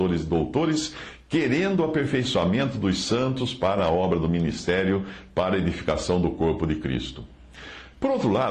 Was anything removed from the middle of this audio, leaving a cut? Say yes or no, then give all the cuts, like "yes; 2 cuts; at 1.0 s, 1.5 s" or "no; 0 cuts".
no; 0 cuts